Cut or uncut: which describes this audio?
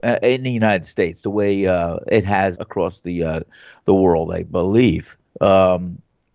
cut